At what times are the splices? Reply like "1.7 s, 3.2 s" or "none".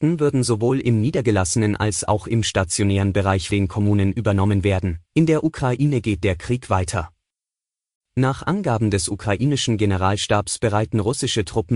3.5 s, 5.0 s, 6.2 s

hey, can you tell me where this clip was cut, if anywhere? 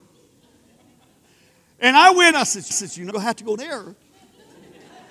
2.3 s, 2.7 s, 3.1 s, 3.6 s

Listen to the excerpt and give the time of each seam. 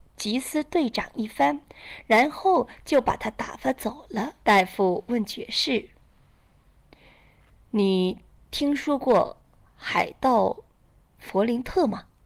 4.4 s

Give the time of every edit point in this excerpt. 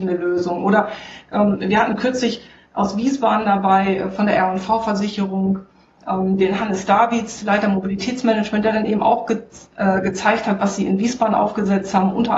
none

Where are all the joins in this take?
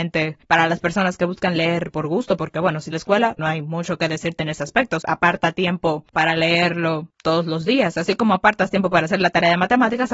1.9 s, 2.9 s, 3.4 s, 5.0 s

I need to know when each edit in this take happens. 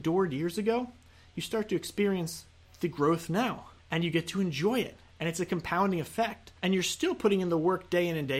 3.8 s, 6.6 s

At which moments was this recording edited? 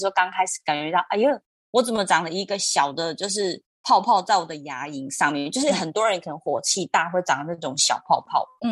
none

